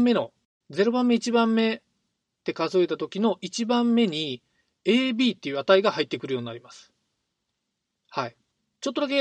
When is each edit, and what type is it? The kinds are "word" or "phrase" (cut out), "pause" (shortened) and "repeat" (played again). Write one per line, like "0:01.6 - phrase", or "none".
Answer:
none